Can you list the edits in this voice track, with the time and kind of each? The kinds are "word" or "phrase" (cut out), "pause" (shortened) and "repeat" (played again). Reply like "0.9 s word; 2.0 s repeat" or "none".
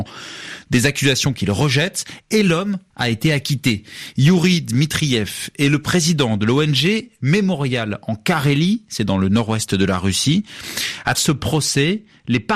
2.9 s word; 11.1 s word